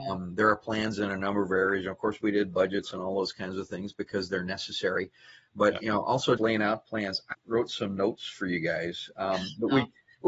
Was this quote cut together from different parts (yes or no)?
yes